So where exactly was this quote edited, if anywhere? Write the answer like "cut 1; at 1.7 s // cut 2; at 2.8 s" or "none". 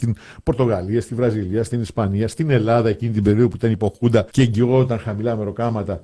cut 1; at 4.3 s